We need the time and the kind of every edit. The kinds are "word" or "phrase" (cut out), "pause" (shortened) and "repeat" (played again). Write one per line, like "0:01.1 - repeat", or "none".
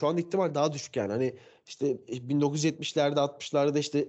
none

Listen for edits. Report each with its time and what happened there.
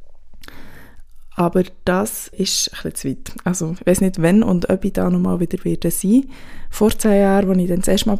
0:02.3 - word

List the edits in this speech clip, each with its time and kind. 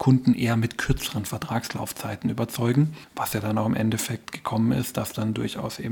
none

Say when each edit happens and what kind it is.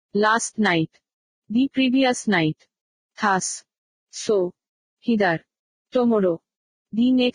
0:05.7 - word

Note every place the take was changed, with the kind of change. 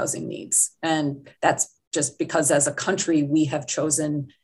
0:01.3 - pause

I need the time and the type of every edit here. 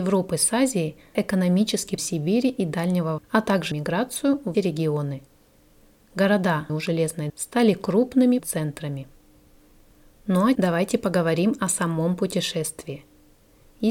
0:01.1 - word
0:02.0 - word
0:03.2 - word
0:03.7 - word
0:04.5 - word
0:06.7 - word
0:07.3 - word
0:08.4 - word
0:10.6 - word

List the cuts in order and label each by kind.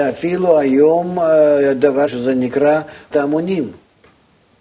0:02.1 - word
0:03.1 - word

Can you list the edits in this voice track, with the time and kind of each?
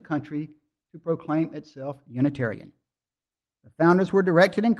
none

